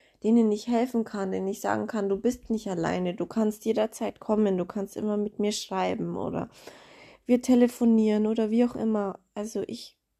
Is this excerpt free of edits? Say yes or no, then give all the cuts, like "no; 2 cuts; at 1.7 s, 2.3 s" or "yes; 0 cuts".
yes; 0 cuts